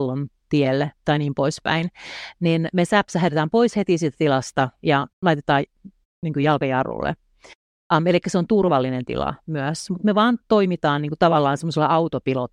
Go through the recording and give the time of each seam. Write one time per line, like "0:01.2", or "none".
0:05.1